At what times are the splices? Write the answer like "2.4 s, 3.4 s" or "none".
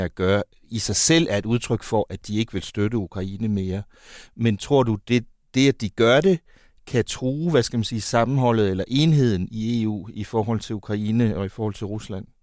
none